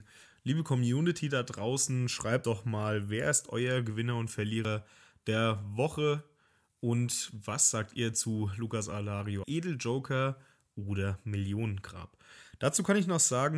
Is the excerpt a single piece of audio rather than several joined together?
no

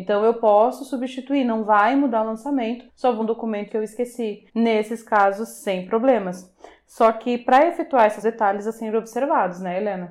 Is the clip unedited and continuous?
no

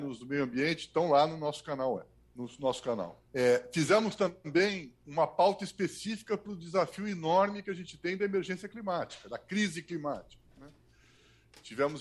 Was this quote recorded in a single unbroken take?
no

